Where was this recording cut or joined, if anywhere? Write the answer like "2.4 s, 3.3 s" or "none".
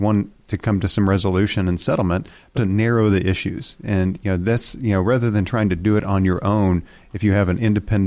2.5 s